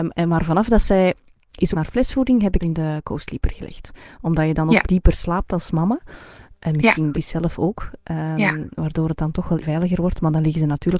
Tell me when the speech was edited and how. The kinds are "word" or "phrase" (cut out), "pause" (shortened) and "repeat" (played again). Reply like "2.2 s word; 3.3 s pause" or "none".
1.7 s word; 2.6 s word; 4.8 s word; 7.1 s word; 9.6 s word